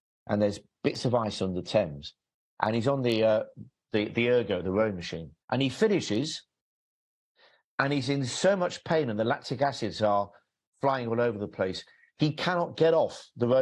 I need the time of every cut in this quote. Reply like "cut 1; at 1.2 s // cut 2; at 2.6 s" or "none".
cut 1; at 5.4 s